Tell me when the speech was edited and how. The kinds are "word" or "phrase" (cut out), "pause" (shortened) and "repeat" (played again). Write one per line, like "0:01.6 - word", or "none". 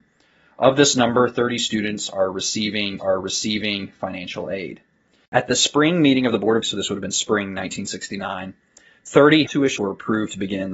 0:03.0 - repeat
0:06.6 - word
0:09.5 - word
0:09.8 - word